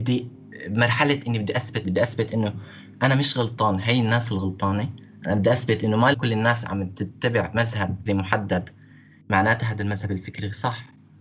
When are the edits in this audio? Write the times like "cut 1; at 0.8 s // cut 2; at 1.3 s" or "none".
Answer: cut 1; at 1.8 s // cut 2; at 6.1 s // cut 3; at 8.1 s